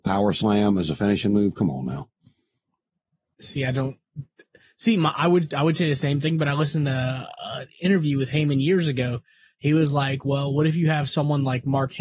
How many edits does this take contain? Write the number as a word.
zero